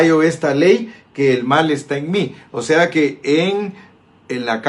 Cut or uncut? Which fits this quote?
uncut